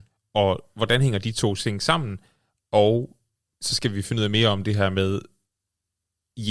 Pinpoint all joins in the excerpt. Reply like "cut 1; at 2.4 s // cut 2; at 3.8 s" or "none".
none